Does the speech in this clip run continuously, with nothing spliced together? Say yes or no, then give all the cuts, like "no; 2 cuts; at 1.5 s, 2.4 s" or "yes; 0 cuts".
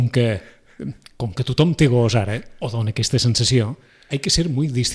yes; 0 cuts